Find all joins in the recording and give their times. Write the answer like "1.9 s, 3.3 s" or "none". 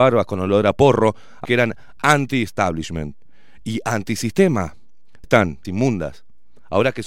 1.4 s, 5.2 s, 5.6 s